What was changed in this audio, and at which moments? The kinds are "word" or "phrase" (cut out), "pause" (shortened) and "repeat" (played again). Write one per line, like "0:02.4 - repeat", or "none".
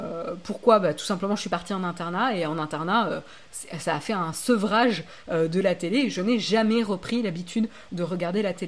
none